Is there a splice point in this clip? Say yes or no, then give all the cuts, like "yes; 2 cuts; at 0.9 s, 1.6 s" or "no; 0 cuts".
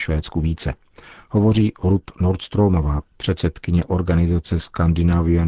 no; 0 cuts